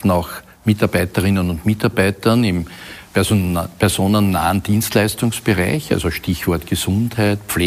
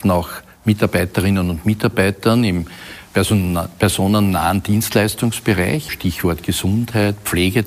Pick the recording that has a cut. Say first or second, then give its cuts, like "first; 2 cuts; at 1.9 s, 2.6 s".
second; 1 cut; at 5.9 s